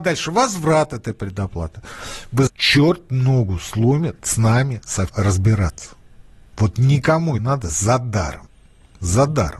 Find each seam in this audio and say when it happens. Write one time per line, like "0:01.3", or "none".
0:02.5
0:04.2
0:05.1
0:07.4